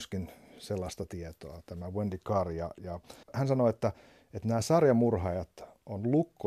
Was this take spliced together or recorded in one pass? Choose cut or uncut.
cut